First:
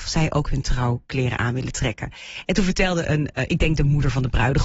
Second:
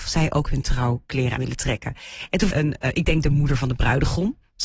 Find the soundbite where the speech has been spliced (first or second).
second